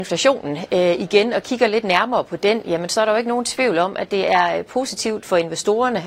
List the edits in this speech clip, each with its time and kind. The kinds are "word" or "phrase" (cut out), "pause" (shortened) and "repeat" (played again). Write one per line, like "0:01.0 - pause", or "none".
none